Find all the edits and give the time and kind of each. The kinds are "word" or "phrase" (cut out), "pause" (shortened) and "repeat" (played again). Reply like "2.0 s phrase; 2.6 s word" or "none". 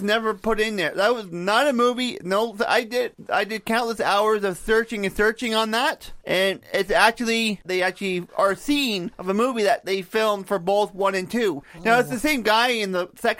7.6 s phrase; 8.3 s word